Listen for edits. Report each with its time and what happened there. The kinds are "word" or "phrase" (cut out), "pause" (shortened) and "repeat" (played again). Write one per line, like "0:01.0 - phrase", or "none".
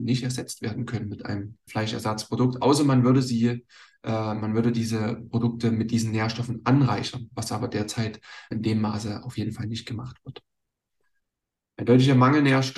0:01.7 - word
0:08.5 - word